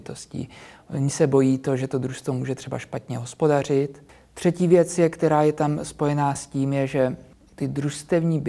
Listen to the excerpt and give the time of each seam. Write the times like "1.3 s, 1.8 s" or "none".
none